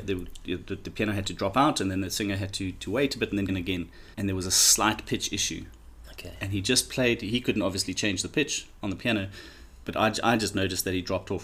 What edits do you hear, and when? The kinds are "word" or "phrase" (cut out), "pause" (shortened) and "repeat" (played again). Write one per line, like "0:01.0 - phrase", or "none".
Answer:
0:03.5 - word
0:04.1 - pause